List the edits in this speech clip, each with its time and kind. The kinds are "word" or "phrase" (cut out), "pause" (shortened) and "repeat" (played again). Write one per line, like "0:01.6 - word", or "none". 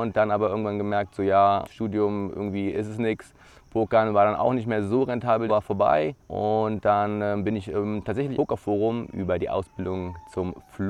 0:01.6 - word
0:05.5 - phrase
0:06.2 - pause
0:08.3 - phrase

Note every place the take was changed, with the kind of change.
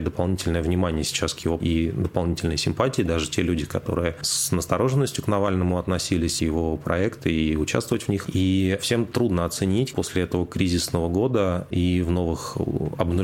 0:01.6 - word
0:06.4 - phrase
0:09.9 - word

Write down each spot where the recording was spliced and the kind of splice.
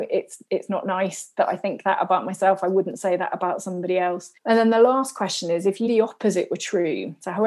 0:04.4 - pause
0:05.9 - word

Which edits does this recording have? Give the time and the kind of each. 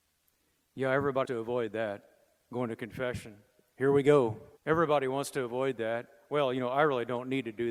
0:01.2 - word
0:04.6 - pause

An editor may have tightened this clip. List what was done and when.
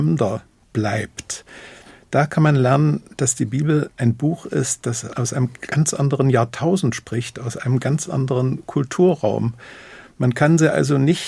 none

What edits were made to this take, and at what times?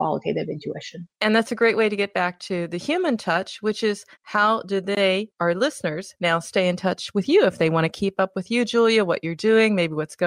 0:01.1 - pause
0:04.1 - pause

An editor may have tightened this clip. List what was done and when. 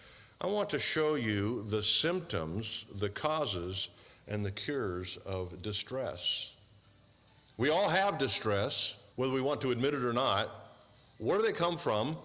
0:09.1 - pause
0:11.1 - pause

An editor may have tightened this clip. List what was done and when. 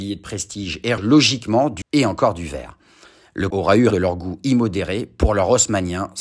0:01.0 - word
0:01.8 - word
0:03.5 - word
0:03.9 - word

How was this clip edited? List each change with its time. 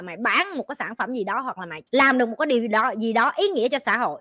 0:01.9 - pause

